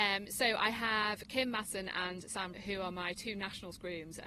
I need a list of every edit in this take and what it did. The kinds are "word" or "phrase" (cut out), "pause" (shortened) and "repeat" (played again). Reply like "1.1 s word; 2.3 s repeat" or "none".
2.5 s word